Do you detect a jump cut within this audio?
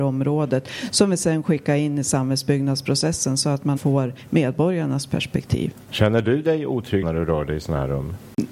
yes; 2 cuts; at 3.8 s, 7.0 s

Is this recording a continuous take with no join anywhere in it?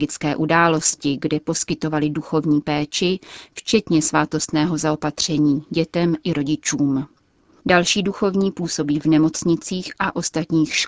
yes; 0 cuts

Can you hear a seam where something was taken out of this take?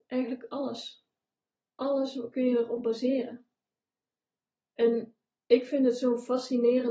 no; 0 cuts

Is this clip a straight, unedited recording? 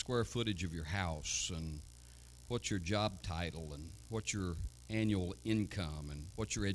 yes; 0 cuts

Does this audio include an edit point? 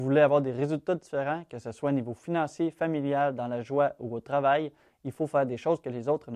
no; 0 cuts

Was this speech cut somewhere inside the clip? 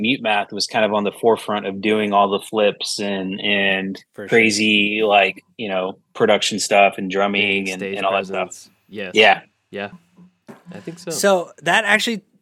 no; 0 cuts

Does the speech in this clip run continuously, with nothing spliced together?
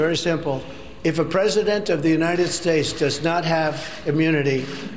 yes; 0 cuts

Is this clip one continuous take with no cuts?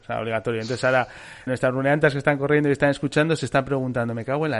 no; 1 cut; at 1.5 s

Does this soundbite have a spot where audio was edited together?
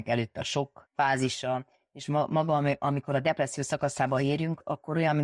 no; 0 cuts

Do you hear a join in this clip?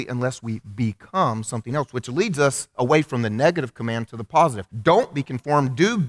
yes; 1 cut; at 4.7 s

